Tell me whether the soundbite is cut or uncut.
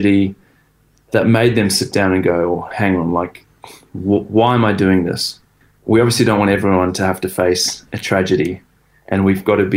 uncut